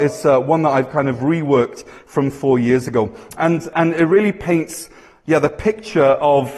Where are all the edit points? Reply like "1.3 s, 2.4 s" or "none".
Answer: 3.7 s